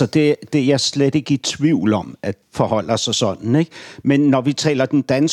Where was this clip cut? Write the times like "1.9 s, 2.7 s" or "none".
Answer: 2.4 s